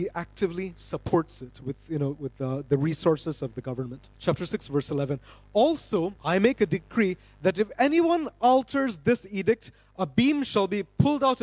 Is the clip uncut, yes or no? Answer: no